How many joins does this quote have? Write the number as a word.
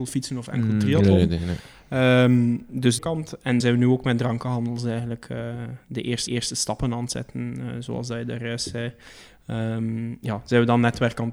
three